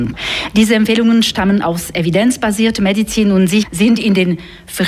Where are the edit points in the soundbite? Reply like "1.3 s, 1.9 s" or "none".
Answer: none